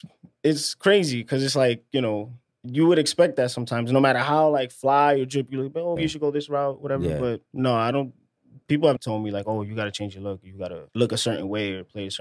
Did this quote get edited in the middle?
yes; 4 cuts; at 6.0 s, 7.5 s, 9.0 s, 10.9 s

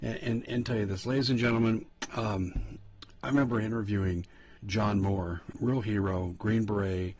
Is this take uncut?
no; 2 cuts; at 4.6 s, 5.5 s

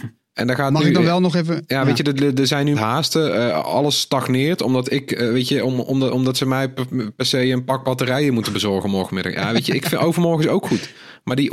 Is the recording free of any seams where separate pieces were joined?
no; 1 cut; at 2.7 s

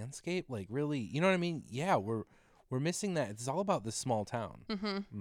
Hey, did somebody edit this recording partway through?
no; 0 cuts

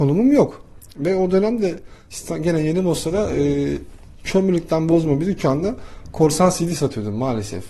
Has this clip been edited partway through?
no; 0 cuts

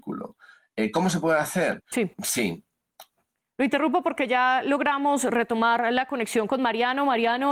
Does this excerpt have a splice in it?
yes; 1 cut; at 2.1 s

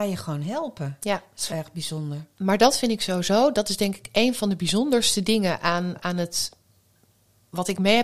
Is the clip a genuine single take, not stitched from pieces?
no; 2 cuts; at 1.5 s, 5.9 s

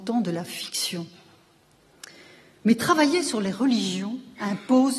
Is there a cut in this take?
no; 0 cuts

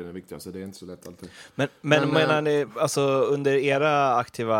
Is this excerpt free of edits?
yes; 0 cuts

